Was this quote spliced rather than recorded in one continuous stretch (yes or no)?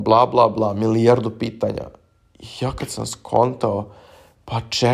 no